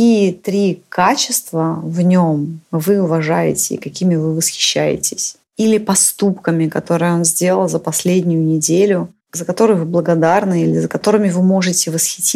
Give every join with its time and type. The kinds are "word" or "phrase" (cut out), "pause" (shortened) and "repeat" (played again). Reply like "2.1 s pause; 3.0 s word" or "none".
2.7 s pause; 5.5 s pause; 9.2 s pause